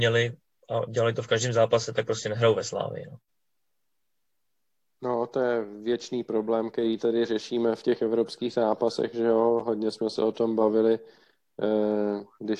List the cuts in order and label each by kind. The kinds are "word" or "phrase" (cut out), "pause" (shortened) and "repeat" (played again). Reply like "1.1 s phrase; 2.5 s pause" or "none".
none